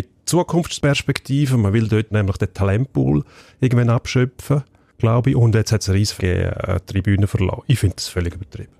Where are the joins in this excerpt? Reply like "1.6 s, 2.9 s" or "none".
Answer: 2.1 s, 6.2 s